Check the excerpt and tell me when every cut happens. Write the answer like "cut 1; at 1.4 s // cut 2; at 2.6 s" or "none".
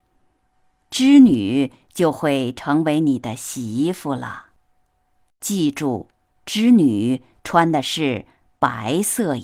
cut 1; at 4.6 s